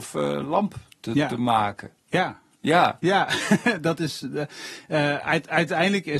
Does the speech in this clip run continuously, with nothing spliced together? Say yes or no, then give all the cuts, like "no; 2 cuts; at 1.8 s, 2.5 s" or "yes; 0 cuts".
no; 1 cut; at 2.0 s